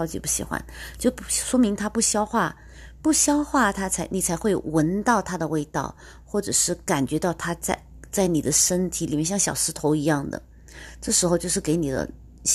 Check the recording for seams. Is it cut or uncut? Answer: uncut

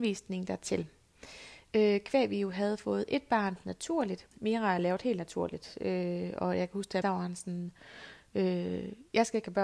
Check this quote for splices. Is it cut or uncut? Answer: cut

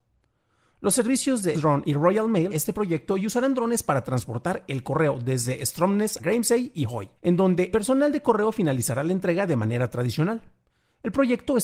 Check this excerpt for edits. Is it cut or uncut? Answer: cut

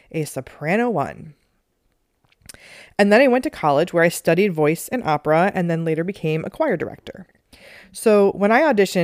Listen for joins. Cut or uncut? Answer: uncut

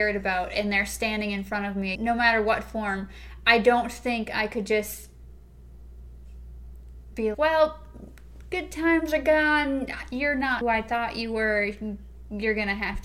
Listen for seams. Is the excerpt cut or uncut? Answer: cut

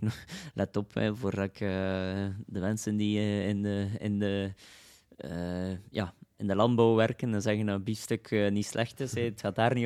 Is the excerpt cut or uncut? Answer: uncut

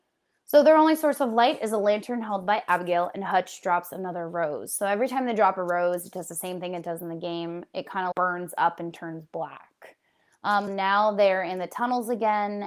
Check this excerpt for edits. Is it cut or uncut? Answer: cut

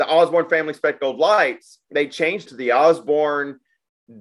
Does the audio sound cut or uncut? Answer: cut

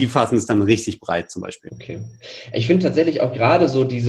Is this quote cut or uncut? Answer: uncut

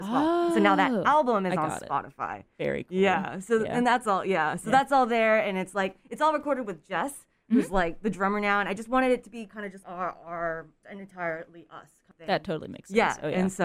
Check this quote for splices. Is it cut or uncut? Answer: cut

